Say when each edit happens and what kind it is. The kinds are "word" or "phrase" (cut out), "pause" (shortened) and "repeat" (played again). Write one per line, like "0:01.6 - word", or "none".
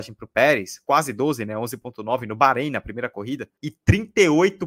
0:03.6 - pause